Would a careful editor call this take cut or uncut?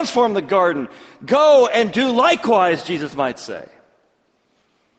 uncut